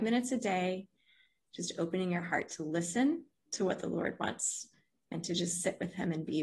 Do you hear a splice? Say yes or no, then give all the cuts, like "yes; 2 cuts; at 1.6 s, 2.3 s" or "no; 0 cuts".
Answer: no; 0 cuts